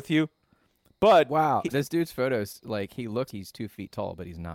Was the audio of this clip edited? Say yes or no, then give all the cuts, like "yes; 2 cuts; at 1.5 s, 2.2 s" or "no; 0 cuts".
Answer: yes; 2 cuts; at 1.7 s, 3.3 s